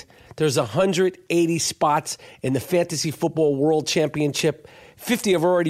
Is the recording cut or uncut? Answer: uncut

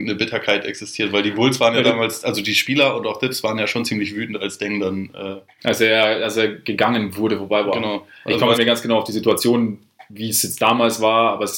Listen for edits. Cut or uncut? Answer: cut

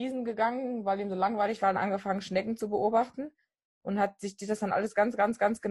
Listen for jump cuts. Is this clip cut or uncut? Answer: cut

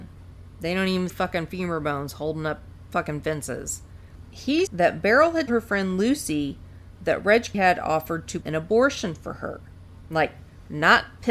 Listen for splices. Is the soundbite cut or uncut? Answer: cut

